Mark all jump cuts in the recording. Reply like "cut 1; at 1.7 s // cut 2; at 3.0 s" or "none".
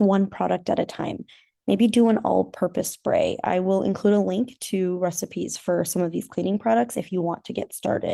none